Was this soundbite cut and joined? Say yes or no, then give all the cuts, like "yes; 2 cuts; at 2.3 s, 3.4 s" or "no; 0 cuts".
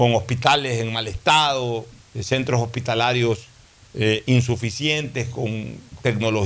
yes; 1 cut; at 2.0 s